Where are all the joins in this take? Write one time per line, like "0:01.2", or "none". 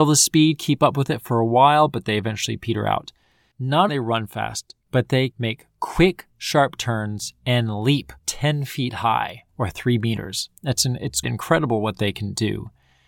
0:03.9
0:04.8
0:05.3
0:08.2
0:10.6
0:11.2